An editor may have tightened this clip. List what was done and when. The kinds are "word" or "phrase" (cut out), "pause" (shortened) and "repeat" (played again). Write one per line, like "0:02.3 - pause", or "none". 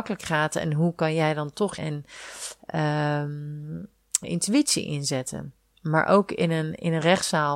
0:01.8 - phrase
0:04.2 - word